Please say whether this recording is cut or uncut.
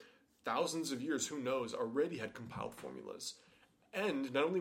uncut